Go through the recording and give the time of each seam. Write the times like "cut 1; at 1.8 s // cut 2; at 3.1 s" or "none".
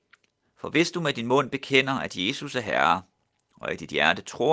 none